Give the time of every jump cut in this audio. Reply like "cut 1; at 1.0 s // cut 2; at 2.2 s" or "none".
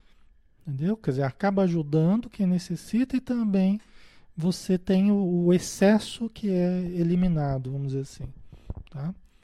none